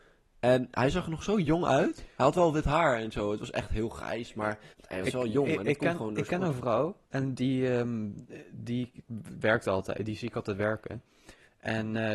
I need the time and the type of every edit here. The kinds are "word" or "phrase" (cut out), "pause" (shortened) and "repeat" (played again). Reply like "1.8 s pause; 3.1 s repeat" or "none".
4.7 s pause; 7.0 s pause